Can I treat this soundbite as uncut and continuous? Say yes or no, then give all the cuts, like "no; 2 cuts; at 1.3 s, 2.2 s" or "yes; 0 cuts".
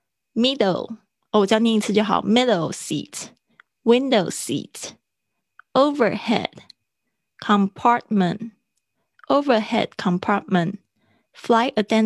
yes; 0 cuts